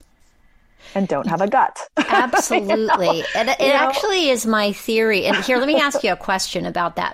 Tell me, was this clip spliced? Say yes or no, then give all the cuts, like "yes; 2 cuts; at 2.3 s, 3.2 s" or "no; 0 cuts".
no; 0 cuts